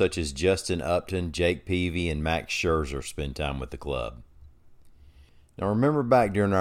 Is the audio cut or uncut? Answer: uncut